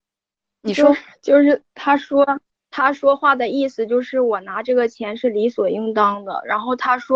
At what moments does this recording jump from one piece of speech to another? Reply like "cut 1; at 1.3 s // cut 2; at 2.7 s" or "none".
cut 1; at 2.5 s